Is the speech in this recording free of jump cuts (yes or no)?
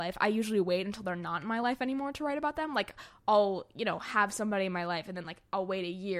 yes